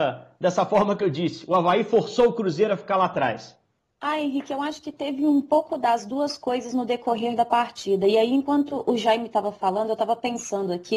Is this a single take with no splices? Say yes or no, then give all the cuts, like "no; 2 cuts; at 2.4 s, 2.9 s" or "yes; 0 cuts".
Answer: yes; 0 cuts